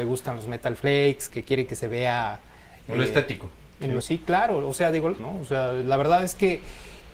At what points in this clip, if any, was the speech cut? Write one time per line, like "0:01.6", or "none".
0:01.3
0:04.0
0:05.2